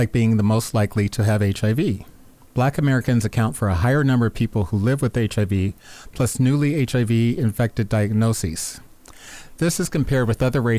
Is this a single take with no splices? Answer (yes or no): yes